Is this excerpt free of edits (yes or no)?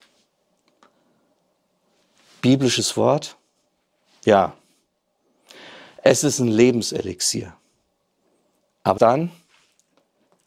no